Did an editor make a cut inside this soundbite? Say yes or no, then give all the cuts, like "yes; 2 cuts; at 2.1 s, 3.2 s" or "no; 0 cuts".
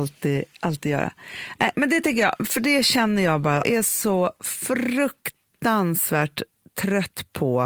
yes; 1 cut; at 3.6 s